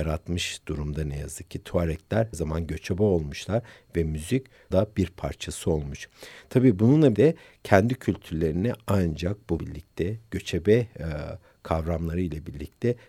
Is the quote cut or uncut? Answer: cut